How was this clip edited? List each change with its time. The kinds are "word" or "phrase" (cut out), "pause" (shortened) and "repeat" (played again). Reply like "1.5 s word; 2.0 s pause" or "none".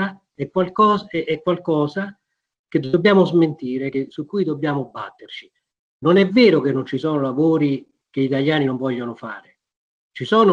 none

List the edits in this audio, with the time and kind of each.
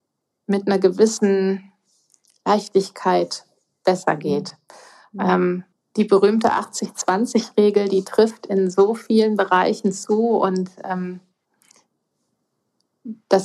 5.7 s pause

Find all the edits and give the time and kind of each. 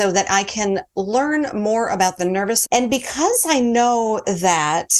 2.6 s word

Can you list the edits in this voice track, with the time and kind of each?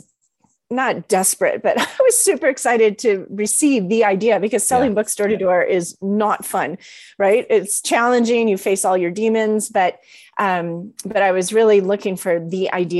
none

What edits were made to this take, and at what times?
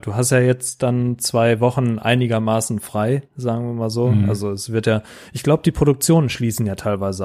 none

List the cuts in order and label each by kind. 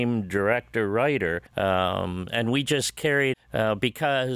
1.5 s pause; 3.3 s phrase

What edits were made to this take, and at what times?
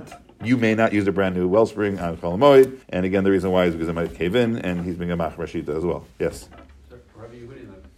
2.8 s pause; 6.1 s pause

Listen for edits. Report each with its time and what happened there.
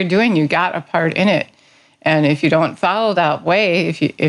none

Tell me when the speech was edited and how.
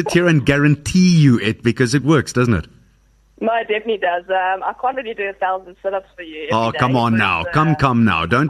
none

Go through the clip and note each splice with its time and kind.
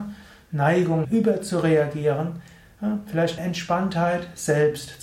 1.0 s word; 3.4 s phrase

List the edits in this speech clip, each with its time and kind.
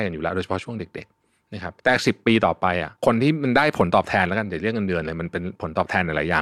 1.8 s pause; 3.0 s pause

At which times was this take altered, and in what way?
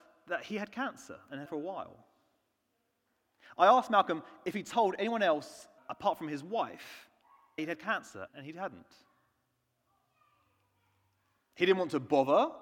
1.5 s word; 5.8 s word; 7.6 s word; 8.3 s word

